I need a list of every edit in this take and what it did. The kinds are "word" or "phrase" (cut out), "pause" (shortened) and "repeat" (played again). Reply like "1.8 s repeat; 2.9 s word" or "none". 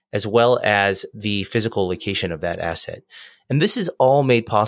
none